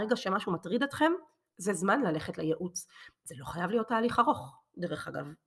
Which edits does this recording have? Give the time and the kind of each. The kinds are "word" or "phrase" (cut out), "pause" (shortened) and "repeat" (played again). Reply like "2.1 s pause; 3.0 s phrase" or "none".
none